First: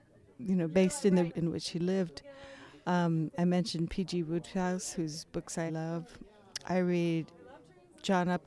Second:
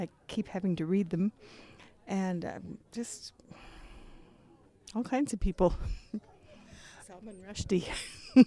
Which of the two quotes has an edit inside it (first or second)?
first